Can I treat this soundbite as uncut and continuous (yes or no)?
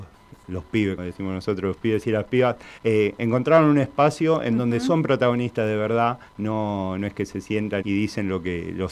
no